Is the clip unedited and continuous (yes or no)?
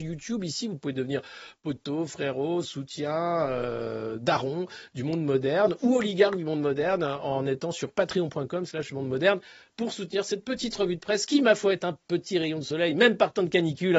yes